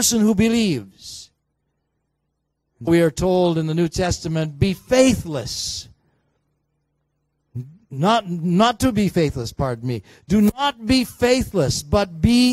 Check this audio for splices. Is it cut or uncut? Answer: cut